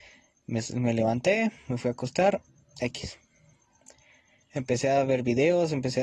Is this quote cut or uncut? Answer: uncut